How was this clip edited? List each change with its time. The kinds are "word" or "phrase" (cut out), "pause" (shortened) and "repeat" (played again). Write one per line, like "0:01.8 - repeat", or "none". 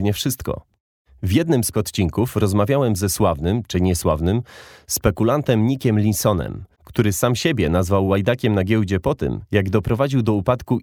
0:01.7 - word
0:03.7 - word
0:06.7 - pause